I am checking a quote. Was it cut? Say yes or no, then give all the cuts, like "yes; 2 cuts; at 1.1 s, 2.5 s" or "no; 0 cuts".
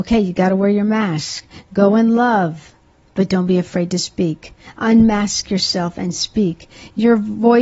no; 0 cuts